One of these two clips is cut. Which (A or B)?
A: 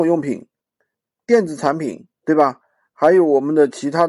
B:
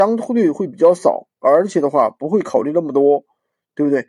A